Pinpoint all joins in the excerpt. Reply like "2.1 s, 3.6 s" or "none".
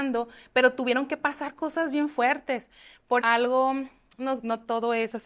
3.2 s